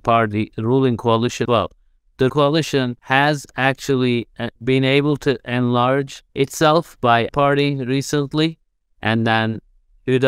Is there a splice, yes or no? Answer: yes